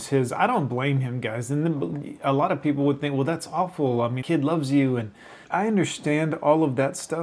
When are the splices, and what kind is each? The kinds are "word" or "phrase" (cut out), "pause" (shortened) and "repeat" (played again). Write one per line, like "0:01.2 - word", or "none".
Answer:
0:04.2 - word
0:05.4 - pause